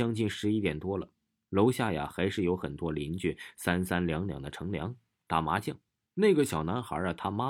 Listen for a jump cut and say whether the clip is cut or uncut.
uncut